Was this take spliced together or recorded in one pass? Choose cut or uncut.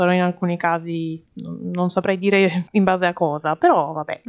cut